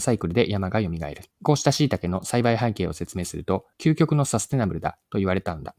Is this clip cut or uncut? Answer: cut